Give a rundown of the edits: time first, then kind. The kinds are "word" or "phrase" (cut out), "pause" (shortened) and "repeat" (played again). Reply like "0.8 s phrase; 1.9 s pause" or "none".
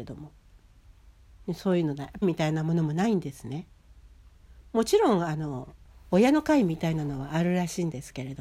2.2 s word; 5.9 s pause